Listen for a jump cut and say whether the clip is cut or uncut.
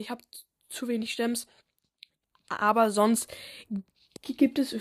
uncut